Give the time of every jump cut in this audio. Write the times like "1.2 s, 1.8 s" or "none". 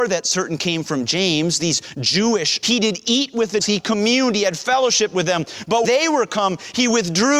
2.6 s, 3.6 s, 5.8 s